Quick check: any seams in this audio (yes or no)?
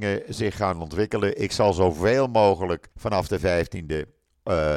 yes